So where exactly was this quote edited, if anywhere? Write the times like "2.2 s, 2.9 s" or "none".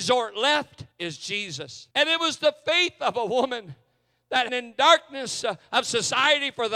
0.9 s, 1.9 s, 4.5 s